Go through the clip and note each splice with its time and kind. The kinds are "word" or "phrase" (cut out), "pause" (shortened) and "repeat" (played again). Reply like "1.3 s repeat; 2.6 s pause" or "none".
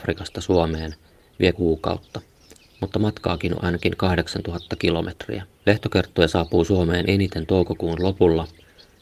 1.5 s phrase; 3.5 s word; 5.5 s pause